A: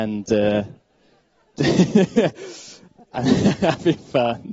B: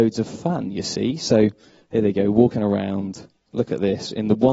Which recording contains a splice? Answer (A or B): A